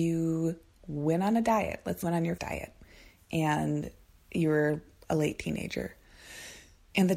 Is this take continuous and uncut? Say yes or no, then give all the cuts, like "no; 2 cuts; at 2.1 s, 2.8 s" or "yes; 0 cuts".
no; 2 cuts; at 2.0 s, 2.4 s